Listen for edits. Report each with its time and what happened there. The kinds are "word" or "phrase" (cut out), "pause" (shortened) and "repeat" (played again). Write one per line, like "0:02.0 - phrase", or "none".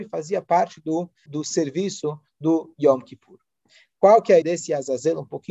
0:01.3 - word
0:04.4 - word